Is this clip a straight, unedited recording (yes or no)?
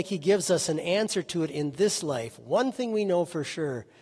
yes